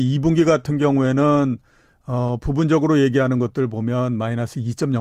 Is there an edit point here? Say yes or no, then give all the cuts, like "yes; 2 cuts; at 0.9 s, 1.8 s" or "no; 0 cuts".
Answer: no; 0 cuts